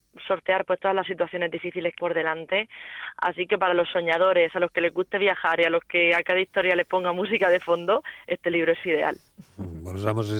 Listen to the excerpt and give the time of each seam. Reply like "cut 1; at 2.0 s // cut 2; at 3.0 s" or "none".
cut 1; at 2.0 s